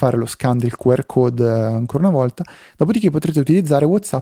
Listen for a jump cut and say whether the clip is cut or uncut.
uncut